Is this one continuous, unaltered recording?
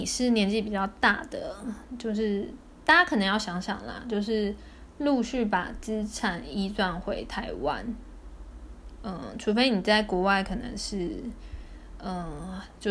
yes; 0 cuts

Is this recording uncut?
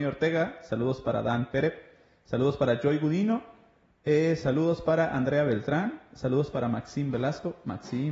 yes; 0 cuts

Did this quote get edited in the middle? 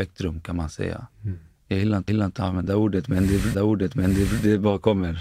yes; 3 cuts; at 2.1 s, 2.7 s, 3.5 s

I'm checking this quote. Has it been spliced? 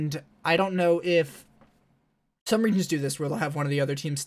no; 0 cuts

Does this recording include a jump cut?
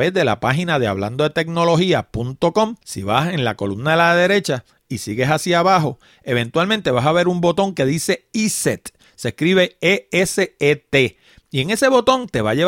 yes; 1 cut; at 2.8 s

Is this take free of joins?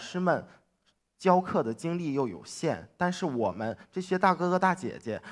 yes; 0 cuts

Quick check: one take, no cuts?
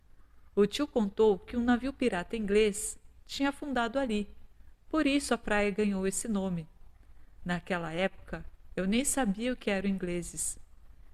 yes; 0 cuts

